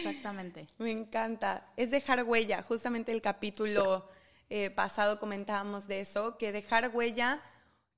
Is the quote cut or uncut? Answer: uncut